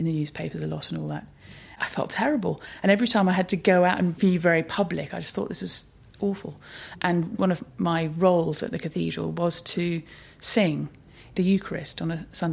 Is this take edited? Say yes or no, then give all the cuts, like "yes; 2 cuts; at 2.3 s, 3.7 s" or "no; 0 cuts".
no; 0 cuts